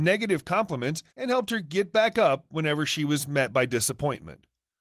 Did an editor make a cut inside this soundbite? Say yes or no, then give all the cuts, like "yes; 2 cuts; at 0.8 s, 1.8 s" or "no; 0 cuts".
yes; 1 cut; at 1.1 s